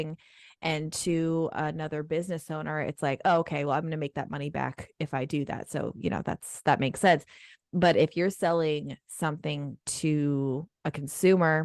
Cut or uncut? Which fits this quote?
uncut